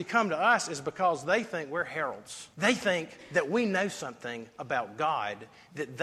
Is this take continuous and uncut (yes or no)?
no